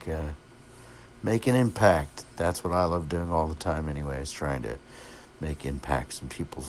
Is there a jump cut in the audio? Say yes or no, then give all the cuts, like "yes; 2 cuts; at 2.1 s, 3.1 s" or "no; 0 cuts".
no; 0 cuts